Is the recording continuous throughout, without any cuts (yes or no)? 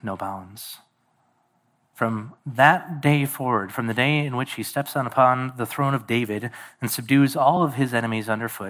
yes